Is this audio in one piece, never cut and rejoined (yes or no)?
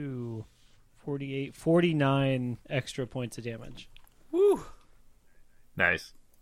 no